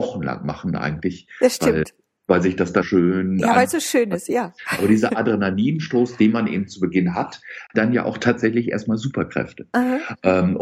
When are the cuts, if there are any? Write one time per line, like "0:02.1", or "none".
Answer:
0:02.8
0:07.7